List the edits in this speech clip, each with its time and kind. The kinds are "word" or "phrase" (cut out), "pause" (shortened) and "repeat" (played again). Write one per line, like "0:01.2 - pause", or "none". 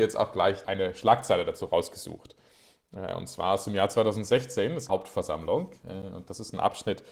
0:04.9 - phrase